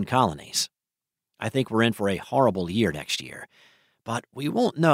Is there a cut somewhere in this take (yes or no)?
no